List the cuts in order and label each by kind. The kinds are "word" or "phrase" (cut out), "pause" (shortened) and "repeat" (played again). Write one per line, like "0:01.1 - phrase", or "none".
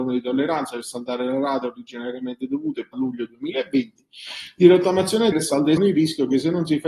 0:02.9 - word
0:05.3 - word
0:05.8 - phrase